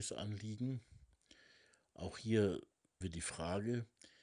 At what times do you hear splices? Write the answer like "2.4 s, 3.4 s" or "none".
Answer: 3.0 s